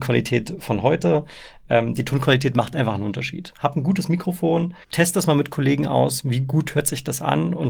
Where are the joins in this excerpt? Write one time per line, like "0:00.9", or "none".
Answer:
0:04.8